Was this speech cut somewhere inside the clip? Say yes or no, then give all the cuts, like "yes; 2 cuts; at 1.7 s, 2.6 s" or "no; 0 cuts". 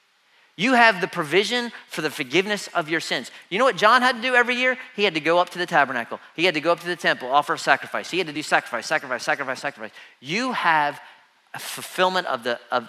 no; 0 cuts